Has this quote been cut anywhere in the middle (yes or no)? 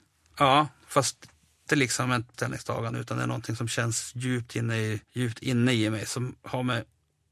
yes